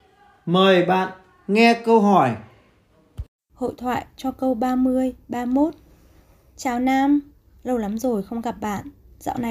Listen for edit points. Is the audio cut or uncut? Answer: uncut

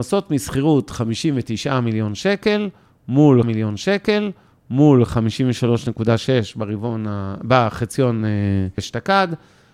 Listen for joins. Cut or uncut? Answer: cut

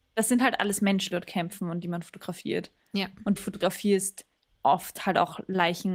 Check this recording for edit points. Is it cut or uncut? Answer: cut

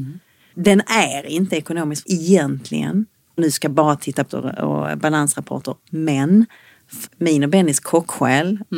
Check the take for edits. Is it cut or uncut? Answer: cut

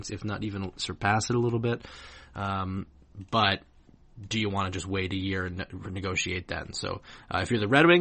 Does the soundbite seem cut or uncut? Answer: uncut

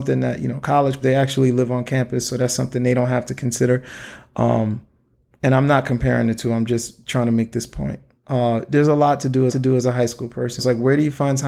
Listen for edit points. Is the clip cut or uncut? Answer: cut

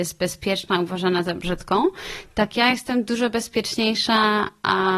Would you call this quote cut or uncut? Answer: uncut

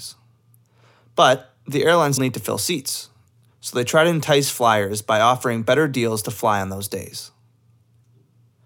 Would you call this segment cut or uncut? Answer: cut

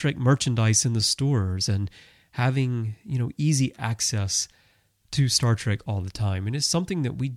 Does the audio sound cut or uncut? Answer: uncut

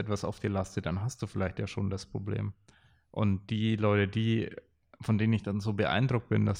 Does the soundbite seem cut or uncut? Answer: uncut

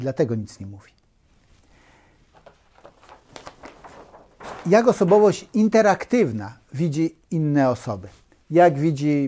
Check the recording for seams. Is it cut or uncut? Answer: uncut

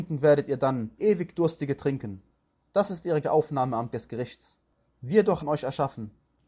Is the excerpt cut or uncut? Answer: cut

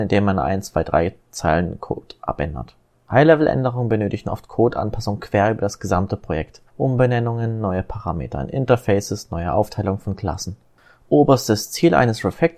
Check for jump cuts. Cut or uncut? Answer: cut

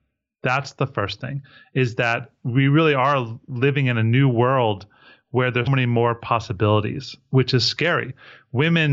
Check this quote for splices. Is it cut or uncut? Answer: cut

